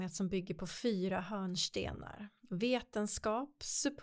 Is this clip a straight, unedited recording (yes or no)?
no